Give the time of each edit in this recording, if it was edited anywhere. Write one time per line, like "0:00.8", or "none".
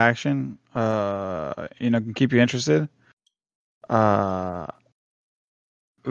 none